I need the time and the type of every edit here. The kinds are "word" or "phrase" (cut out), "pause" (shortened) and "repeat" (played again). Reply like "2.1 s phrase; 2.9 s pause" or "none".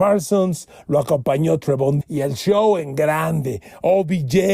2.0 s word